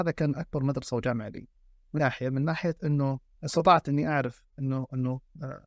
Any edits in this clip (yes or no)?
yes